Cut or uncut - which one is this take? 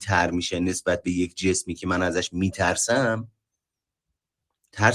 uncut